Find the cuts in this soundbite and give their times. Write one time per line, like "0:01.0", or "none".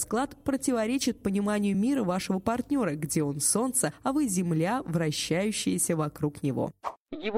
none